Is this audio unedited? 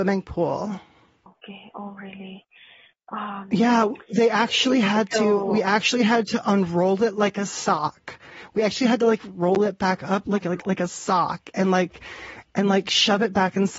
yes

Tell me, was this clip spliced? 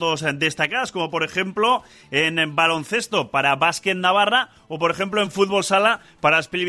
no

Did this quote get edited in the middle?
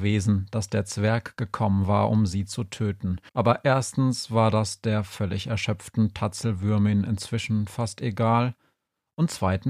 yes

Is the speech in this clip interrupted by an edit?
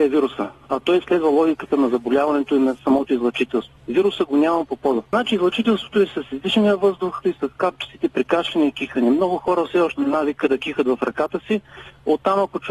yes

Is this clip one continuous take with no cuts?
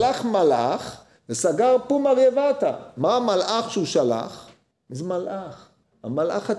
yes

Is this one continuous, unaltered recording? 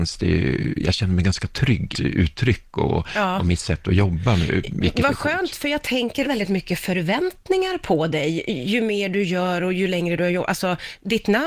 no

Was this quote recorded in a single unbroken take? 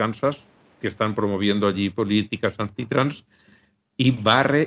yes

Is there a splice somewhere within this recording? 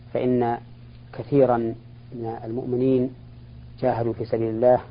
yes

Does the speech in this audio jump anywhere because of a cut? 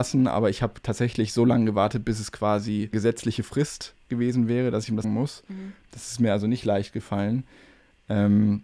yes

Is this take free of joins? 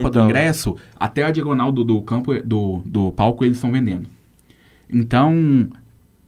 yes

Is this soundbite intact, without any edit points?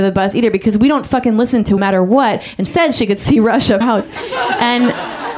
no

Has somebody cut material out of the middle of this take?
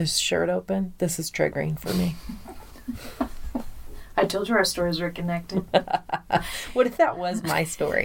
no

